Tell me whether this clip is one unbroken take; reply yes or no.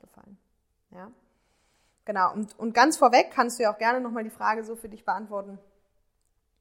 yes